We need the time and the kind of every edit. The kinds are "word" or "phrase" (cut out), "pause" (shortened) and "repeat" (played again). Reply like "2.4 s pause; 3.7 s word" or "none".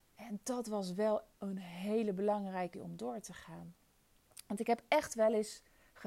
1.3 s word; 2.7 s word